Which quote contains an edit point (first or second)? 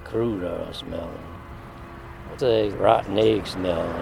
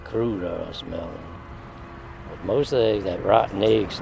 first